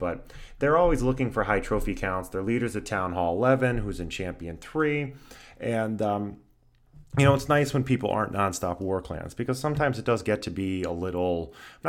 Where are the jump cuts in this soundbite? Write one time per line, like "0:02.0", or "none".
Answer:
none

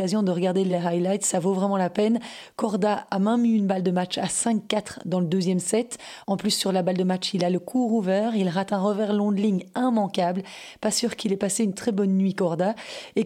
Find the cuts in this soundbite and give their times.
none

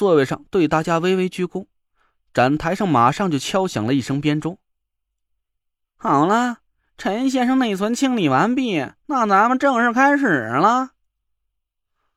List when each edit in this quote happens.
none

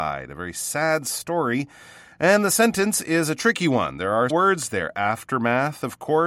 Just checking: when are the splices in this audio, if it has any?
0:04.3

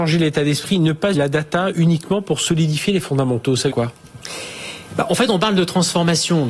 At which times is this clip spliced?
0:01.1
0:03.7

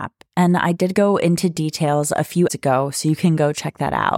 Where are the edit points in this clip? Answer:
0:02.5

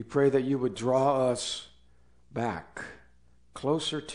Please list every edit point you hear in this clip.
none

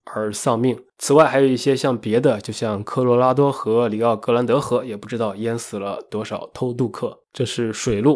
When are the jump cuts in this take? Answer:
0:00.9
0:07.3

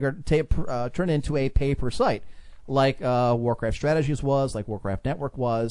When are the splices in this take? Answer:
none

